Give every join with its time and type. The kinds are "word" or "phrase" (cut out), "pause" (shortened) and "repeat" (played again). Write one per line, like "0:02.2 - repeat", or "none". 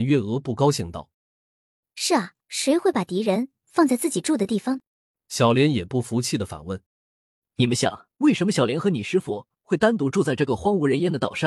0:01.1 - pause
0:02.4 - pause
0:04.9 - pause
0:06.9 - pause
0:08.1 - pause